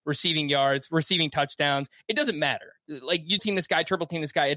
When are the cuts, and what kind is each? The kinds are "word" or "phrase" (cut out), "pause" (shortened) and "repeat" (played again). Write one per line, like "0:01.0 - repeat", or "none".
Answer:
0:03.4 - word